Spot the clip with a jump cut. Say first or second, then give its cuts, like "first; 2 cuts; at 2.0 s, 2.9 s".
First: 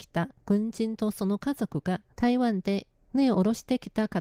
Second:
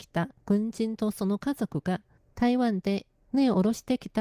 first; 1 cut; at 2.1 s